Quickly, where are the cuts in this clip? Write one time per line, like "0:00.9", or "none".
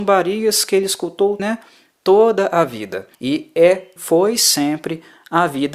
0:01.4
0:03.1
0:04.0